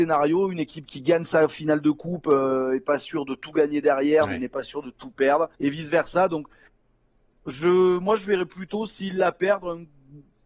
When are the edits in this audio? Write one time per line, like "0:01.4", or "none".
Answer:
0:05.5